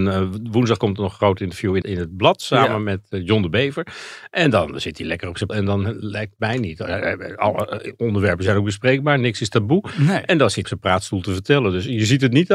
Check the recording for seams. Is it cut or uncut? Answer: cut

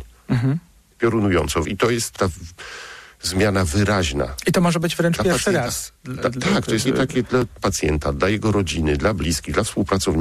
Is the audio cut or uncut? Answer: cut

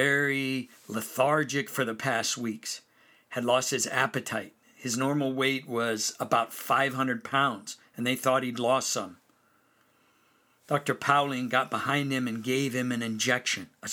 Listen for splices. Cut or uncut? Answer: uncut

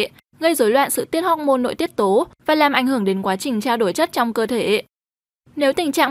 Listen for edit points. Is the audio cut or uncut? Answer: uncut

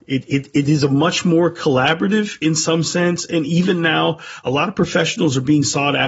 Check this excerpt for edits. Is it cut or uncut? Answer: uncut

